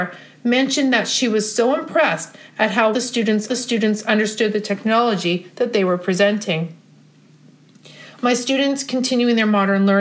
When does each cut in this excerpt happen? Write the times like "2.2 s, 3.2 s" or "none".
2.9 s, 3.5 s